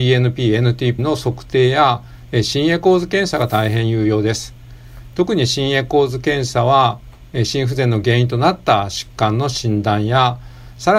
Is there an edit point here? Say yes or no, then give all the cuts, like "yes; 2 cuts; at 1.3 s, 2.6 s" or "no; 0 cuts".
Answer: yes; 1 cut; at 1.0 s